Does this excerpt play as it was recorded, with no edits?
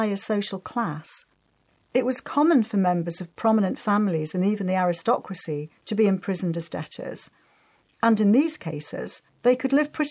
no; 1 cut; at 5.8 s

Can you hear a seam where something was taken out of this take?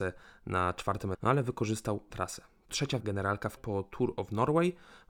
yes; 5 cuts; at 1.1 s, 2.1 s, 2.7 s, 3.0 s, 3.6 s

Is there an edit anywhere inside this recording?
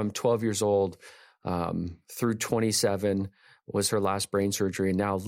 no; 0 cuts

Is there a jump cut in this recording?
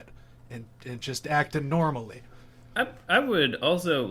no; 0 cuts

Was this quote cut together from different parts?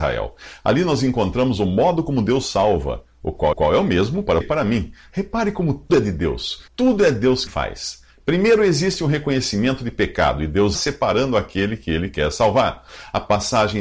yes; 6 cuts; at 3.5 s, 4.4 s, 5.9 s, 6.7 s, 7.5 s, 10.7 s

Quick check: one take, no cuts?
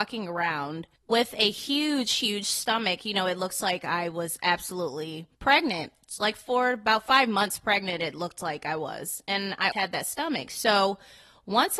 no; 3 cuts; at 1.0 s, 5.3 s, 9.7 s

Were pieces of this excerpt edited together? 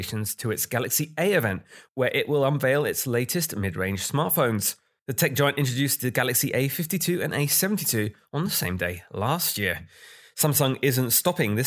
no; 0 cuts

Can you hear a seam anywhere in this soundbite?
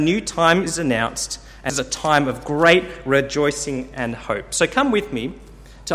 yes; 1 cut; at 1.7 s

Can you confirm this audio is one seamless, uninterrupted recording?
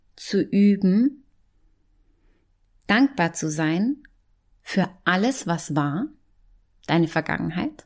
yes; 0 cuts

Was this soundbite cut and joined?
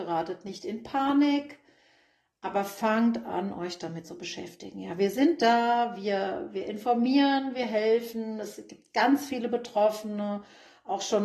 no; 0 cuts

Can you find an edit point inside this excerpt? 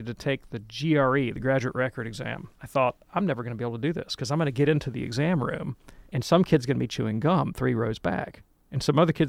yes; 2 cuts; at 2.5 s, 6.1 s

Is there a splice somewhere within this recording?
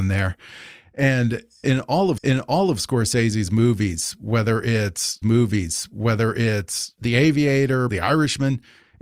yes; 3 cuts; at 2.2 s, 5.2 s, 7.9 s

